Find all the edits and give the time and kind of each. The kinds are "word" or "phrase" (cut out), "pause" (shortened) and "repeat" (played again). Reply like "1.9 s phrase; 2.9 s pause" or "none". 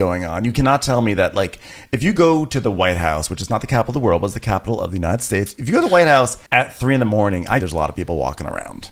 6.5 s pause; 7.6 s word